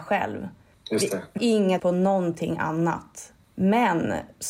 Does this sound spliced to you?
yes; 2 cuts; at 1.4 s, 1.8 s

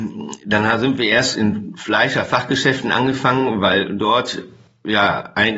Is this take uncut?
yes; 0 cuts

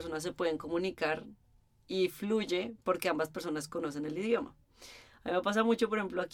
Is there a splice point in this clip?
no; 0 cuts

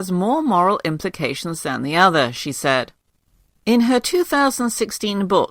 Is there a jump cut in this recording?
no; 0 cuts

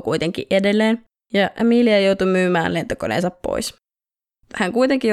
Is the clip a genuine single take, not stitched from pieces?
yes; 0 cuts

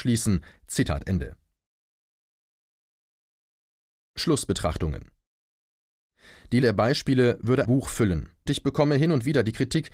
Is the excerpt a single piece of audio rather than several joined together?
no; 3 cuts; at 6.6 s, 7.6 s, 8.5 s

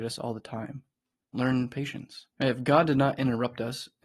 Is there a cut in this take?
yes; 2 cuts; at 1.3 s, 2.3 s

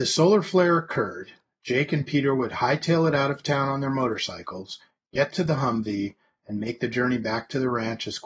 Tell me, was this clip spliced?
no; 0 cuts

